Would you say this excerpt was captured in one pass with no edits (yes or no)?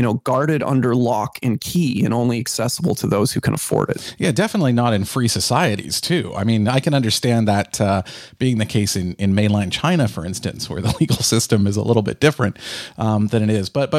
yes